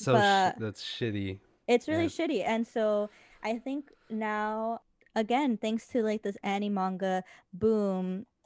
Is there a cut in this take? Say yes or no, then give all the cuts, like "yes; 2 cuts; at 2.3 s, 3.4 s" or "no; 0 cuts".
no; 0 cuts